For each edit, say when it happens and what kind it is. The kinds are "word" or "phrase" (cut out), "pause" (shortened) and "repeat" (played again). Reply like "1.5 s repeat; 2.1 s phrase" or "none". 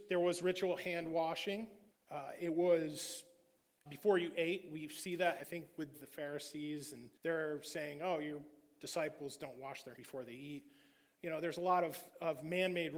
1.9 s pause; 3.9 s word; 5.4 s word; 5.9 s phrase; 7.2 s pause; 10.0 s word